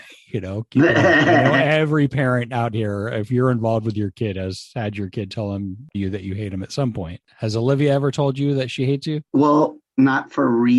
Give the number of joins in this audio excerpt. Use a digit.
2